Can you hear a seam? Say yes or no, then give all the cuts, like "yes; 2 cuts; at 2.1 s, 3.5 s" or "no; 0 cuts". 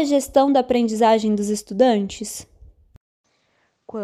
no; 0 cuts